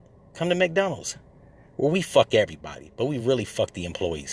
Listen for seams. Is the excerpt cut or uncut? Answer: uncut